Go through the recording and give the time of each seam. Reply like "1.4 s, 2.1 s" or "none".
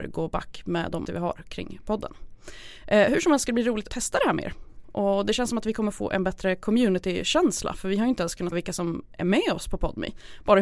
1.0 s, 3.9 s, 8.5 s